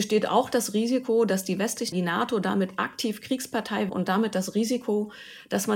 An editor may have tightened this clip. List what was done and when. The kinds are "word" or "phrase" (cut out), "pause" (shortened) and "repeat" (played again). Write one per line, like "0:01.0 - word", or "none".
0:01.9 - phrase
0:03.9 - word